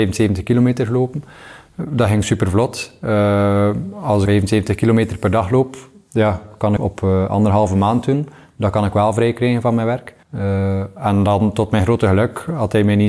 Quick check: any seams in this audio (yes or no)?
yes